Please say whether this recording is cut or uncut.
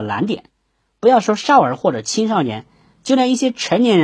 uncut